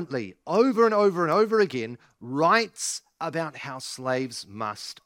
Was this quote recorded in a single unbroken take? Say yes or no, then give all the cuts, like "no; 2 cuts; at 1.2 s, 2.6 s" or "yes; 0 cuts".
yes; 0 cuts